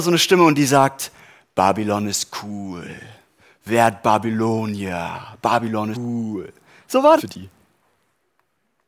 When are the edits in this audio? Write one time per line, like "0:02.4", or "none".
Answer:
0:05.9
0:07.2